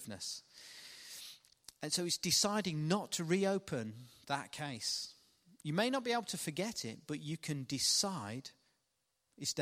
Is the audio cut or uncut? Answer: uncut